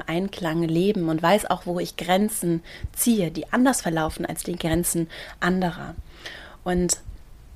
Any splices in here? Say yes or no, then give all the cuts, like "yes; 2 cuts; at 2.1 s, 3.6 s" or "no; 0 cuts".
no; 0 cuts